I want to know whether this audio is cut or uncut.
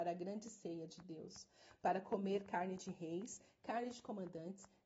uncut